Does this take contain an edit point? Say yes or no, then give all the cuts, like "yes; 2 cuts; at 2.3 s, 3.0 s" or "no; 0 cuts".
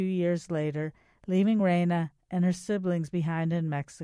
no; 0 cuts